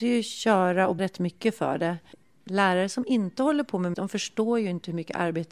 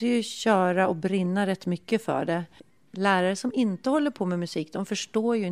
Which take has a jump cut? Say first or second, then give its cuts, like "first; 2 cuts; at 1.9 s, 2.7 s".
first; 2 cuts; at 1.0 s, 3.9 s